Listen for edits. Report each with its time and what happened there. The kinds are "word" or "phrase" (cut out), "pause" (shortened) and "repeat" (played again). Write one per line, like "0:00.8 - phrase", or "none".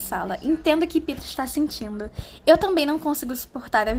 none